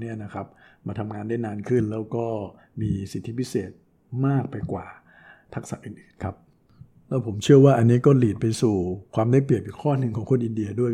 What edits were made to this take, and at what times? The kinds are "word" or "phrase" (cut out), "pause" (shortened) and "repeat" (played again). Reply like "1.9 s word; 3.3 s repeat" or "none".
none